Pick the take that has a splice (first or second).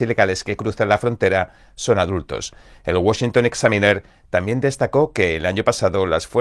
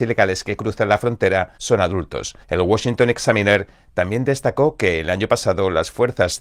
second